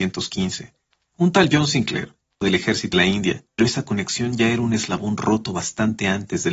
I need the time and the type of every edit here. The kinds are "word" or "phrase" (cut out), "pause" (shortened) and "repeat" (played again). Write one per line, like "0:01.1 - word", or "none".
0:02.4 - word
0:02.9 - word
0:03.6 - word

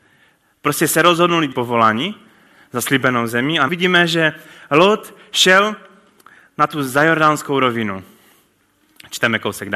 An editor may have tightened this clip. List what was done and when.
0:01.5 - phrase
0:03.7 - word

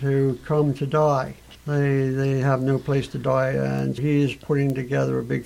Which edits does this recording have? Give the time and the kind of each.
0:01.5 - pause
0:04.0 - word

